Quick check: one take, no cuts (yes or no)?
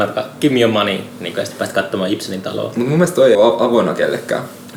no